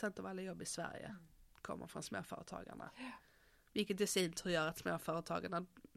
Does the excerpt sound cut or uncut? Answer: uncut